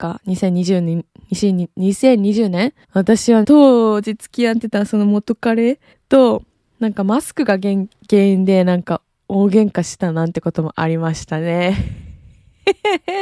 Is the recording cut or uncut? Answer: cut